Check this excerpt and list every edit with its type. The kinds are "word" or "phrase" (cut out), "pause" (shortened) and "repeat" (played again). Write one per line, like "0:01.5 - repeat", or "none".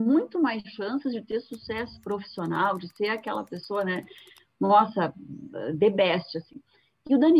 none